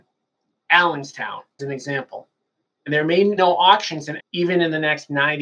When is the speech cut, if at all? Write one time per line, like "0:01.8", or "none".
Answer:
0:01.6
0:03.4
0:04.2

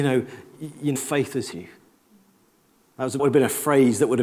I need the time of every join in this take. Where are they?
0:01.0
0:01.5
0:03.2

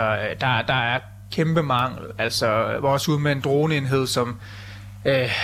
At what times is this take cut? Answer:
none

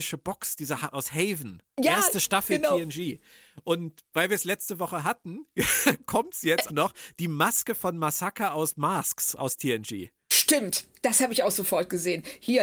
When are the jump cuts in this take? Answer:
0:00.9
0:06.7

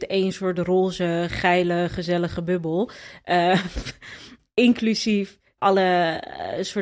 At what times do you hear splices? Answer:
0:05.6

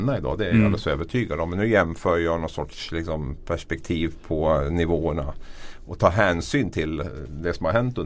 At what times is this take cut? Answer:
0:04.2

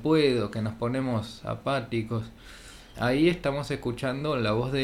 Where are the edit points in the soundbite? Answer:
0:02.9

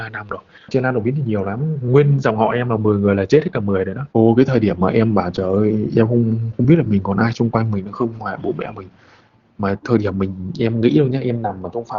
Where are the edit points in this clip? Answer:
0:04.1

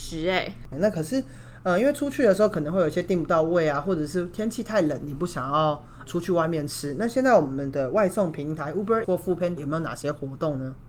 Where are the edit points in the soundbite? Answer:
0:06.1
0:09.0
0:09.6

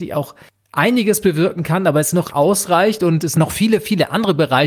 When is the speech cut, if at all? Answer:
0:02.3

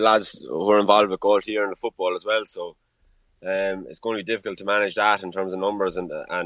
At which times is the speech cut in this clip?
none

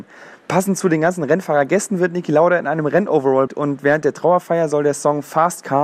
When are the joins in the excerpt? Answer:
0:03.5

